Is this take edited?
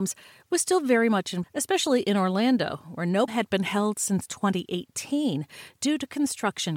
yes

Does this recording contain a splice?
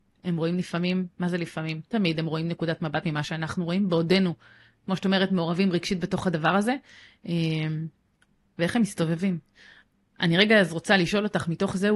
yes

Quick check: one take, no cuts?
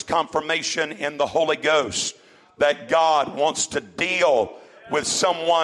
yes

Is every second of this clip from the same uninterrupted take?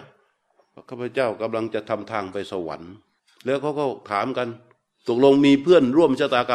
no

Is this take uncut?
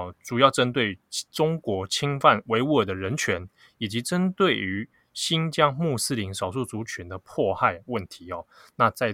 yes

